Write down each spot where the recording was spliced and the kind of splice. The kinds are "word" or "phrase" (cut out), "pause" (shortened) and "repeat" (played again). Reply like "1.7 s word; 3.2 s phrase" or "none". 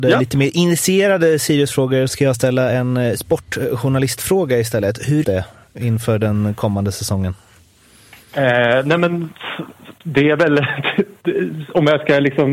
2.1 s word; 5.2 s word